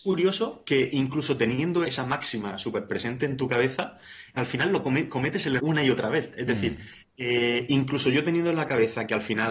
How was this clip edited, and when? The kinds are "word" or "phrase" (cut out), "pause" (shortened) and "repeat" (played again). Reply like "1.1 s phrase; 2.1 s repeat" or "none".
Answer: 1.8 s word; 4.4 s word; 5.6 s word